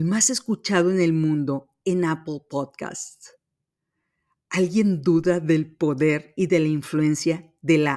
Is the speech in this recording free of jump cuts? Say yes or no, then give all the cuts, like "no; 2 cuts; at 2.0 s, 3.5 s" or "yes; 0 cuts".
yes; 0 cuts